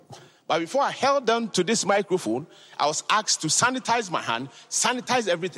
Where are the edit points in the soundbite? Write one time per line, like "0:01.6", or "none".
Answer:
none